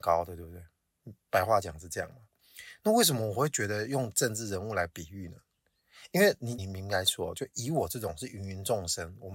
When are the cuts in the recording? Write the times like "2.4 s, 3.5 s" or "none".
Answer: 6.6 s